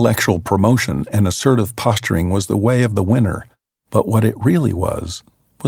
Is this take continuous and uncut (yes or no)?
yes